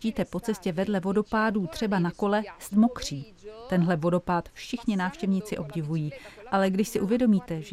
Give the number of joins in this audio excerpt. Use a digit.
1